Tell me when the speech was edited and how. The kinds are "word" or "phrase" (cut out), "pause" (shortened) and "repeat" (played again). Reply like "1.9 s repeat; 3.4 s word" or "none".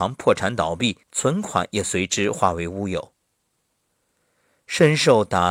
1.0 s pause

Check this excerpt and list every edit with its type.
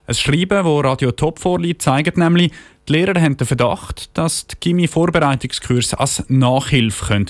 none

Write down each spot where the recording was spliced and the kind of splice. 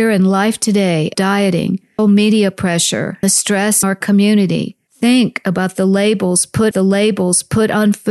1.1 s word; 2.0 s word; 3.2 s word; 3.8 s word; 4.9 s pause; 6.7 s repeat

